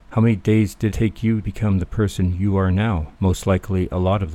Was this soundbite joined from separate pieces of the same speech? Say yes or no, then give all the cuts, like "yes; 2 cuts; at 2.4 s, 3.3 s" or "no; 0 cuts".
yes; 3 cuts; at 0.9 s, 1.4 s, 3.1 s